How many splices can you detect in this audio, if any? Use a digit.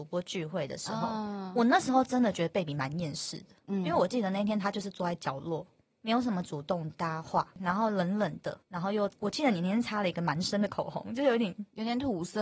0